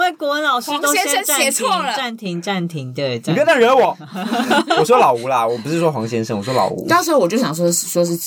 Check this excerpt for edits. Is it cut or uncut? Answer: uncut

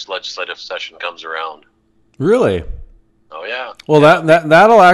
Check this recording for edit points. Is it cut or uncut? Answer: uncut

